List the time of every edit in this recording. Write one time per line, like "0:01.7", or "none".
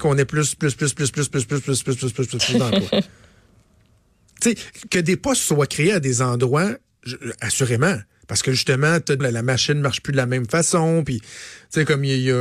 0:08.2
0:09.2